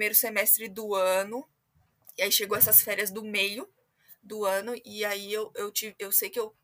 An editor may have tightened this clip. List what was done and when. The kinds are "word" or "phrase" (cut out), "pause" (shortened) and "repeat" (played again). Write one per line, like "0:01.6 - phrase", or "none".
none

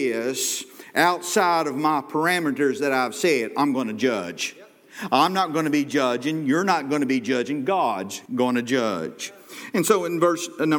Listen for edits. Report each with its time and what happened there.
0:08.3 - pause

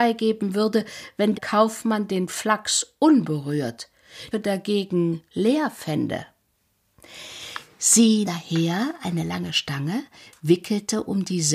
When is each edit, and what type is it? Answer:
0:01.3 - word
0:04.3 - phrase
0:05.3 - pause
0:08.2 - word

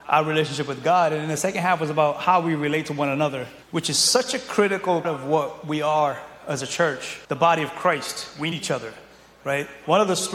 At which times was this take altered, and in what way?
0:03.6 - pause
0:05.0 - word
0:07.2 - pause
0:08.5 - word

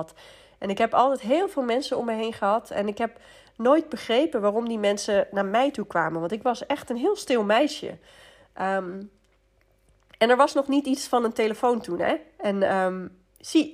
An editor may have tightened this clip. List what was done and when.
none

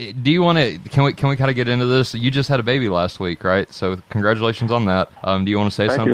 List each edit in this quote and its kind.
0:05.1 - pause

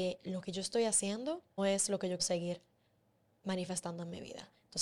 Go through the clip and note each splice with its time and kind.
0:01.6 - word
0:02.2 - word

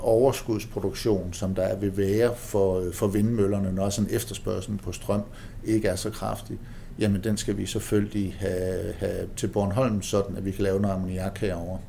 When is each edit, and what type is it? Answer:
none

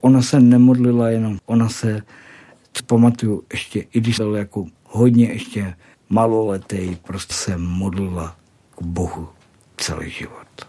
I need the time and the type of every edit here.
0:01.4 - phrase
0:02.8 - word
0:04.2 - word
0:04.8 - pause
0:05.9 - pause
0:07.3 - word

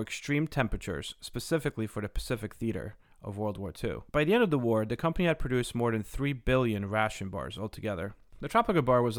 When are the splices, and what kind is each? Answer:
0:04.1 - pause

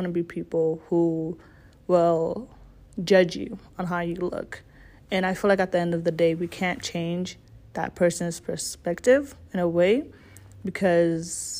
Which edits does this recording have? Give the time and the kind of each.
none

